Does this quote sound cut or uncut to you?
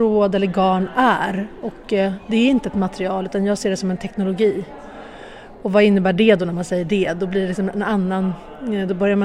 uncut